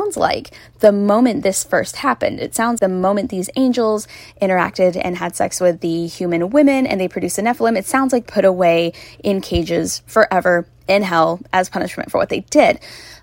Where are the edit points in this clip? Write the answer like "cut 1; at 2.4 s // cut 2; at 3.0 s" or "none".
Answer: cut 1; at 2.8 s // cut 2; at 8.3 s